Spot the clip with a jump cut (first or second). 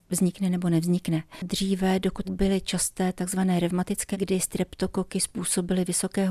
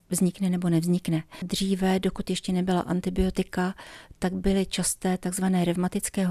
first